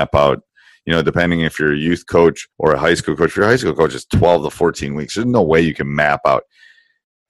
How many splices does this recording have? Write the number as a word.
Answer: one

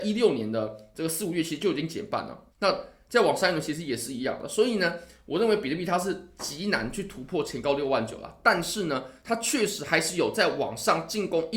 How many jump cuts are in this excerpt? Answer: one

